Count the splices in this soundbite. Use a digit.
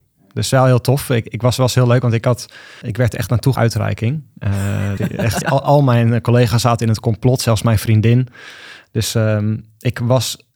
4